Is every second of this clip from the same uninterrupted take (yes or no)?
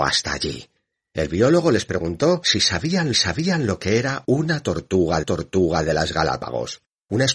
no